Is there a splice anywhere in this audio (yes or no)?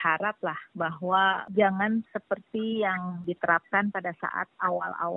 yes